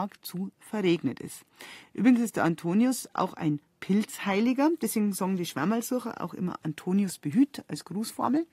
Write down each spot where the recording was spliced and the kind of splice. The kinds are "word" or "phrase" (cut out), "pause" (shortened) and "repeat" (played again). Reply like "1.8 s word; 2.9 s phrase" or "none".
none